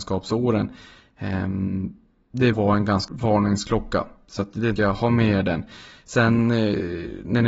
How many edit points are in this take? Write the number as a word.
three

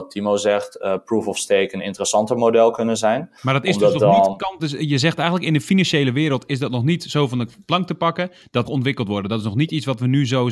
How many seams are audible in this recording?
three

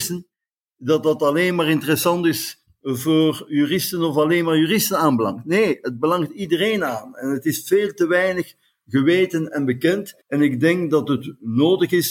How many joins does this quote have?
one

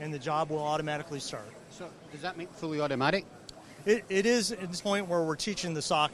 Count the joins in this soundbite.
two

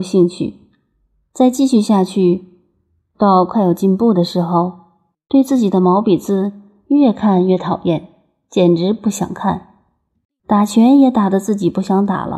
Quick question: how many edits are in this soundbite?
zero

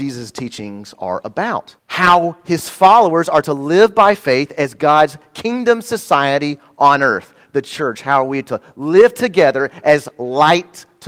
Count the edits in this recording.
one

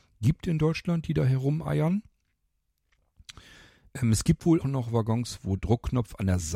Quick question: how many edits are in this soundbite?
two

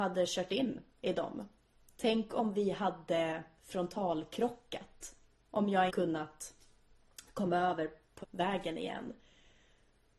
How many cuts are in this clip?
four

